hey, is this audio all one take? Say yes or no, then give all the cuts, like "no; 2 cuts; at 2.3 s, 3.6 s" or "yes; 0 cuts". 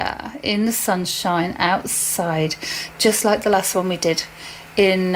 yes; 0 cuts